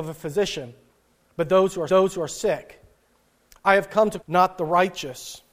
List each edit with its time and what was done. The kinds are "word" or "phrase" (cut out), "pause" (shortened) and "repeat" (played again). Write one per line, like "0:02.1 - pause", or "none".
0:01.9 - repeat
0:04.2 - word